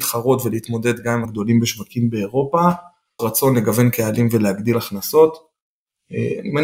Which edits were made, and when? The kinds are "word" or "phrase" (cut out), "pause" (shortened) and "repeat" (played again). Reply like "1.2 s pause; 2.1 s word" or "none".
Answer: 1.2 s word; 3.2 s word